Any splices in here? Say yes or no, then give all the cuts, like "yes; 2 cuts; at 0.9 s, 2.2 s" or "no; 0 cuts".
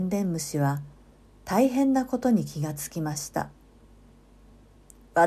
no; 0 cuts